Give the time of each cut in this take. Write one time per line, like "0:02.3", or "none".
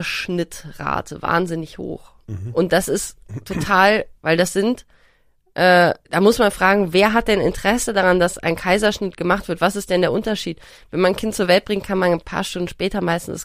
0:04.2
0:06.1

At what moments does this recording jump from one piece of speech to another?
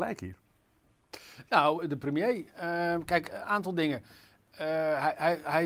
none

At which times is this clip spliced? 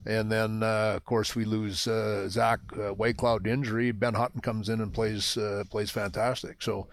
none

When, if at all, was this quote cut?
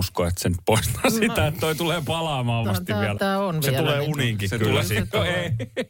0:02.6
0:03.2

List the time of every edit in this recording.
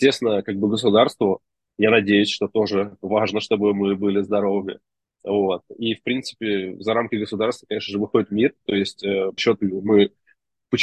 0:09.4

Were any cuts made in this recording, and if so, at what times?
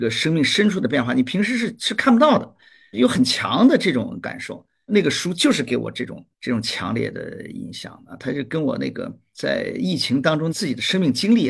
0:06.3

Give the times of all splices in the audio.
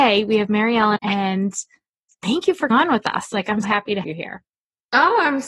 0:01.0
0:02.7
0:03.6
0:04.0

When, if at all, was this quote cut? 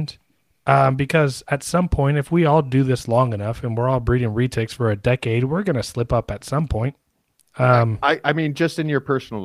none

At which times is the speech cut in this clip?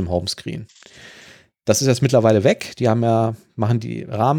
none

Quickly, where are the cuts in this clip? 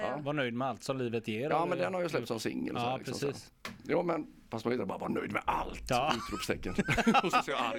none

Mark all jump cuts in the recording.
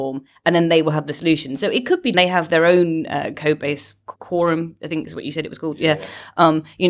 0:02.1
0:04.2

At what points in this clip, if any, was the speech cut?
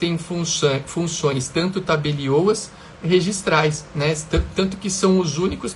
0:03.0

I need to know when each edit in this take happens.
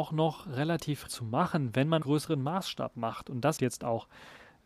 0:01.1
0:02.0
0:03.6

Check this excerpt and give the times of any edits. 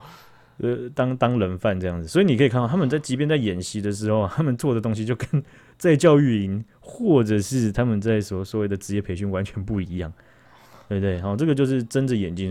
none

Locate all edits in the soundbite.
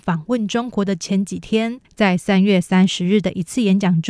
0:01.8

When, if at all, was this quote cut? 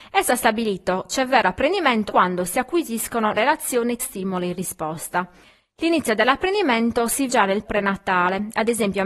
0:01.1
0:02.1
0:03.3
0:04.0
0:07.3
0:07.6

